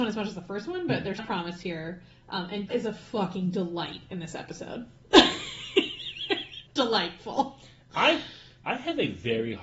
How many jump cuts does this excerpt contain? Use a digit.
3